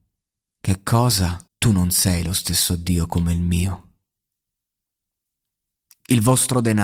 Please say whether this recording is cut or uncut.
cut